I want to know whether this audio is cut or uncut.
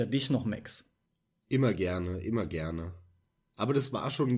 uncut